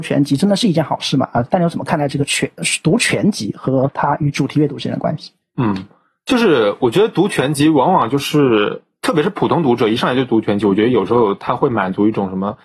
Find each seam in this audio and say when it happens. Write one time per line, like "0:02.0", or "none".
none